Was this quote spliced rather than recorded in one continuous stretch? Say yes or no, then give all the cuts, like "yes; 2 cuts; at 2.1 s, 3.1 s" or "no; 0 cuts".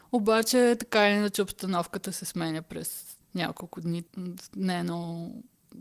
yes; 1 cut; at 3.2 s